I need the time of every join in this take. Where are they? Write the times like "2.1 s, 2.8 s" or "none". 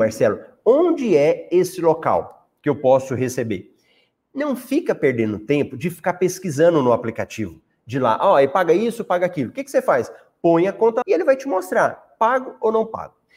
11.0 s